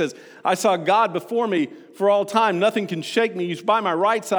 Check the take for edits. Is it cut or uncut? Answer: uncut